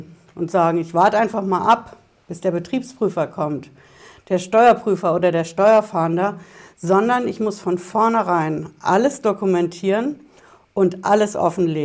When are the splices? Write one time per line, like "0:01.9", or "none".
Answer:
none